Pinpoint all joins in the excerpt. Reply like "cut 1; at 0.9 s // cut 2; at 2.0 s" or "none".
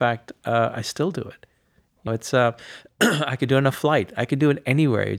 cut 1; at 2.1 s